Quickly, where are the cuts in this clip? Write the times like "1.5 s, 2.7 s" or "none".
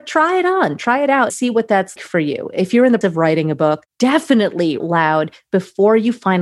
1.3 s, 2.0 s, 3.0 s, 4.8 s